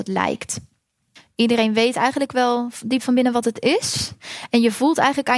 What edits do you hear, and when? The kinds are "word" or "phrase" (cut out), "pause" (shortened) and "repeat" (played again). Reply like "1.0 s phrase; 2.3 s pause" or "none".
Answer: none